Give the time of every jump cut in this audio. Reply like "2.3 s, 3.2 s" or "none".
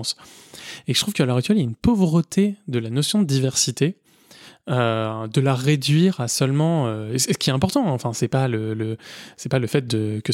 none

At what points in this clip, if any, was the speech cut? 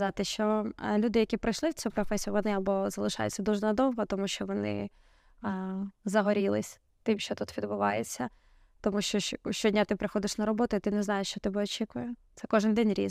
none

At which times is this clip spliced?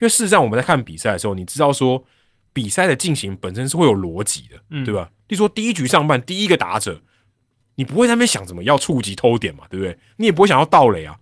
none

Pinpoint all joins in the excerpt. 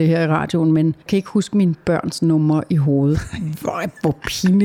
1.1 s

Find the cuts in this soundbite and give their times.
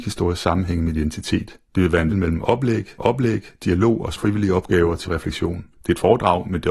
1.7 s, 2.1 s, 3.0 s, 4.2 s, 5.1 s, 5.7 s

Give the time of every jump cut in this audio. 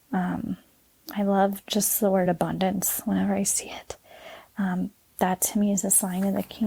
none

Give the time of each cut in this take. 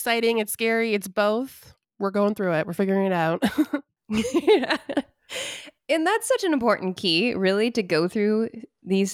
1.8 s

